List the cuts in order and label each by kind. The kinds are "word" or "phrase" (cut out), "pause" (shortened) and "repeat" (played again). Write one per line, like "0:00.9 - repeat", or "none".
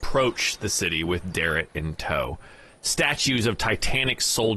none